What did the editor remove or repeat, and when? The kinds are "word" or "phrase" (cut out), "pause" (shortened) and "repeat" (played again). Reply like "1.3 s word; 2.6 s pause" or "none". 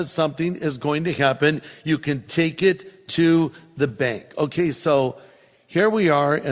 none